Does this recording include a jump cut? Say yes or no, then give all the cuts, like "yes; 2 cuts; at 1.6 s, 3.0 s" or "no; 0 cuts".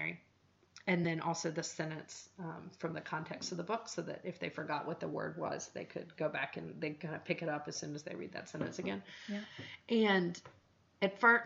no; 0 cuts